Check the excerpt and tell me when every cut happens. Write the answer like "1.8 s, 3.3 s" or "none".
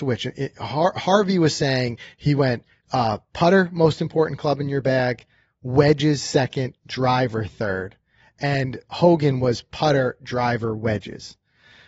2.8 s